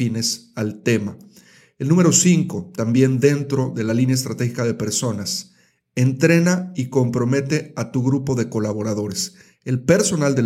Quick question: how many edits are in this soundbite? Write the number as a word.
zero